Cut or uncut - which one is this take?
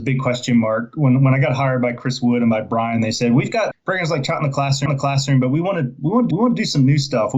cut